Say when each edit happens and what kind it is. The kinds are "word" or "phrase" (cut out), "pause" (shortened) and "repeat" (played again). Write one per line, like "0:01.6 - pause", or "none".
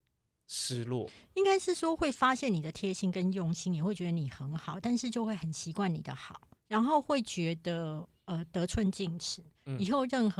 0:06.6 - word